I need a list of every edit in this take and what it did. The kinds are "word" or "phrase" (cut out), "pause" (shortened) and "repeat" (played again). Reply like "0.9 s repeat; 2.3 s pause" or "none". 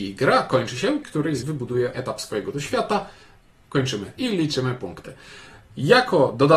1.0 s word; 1.4 s word; 1.9 s word; 2.5 s word; 4.2 s word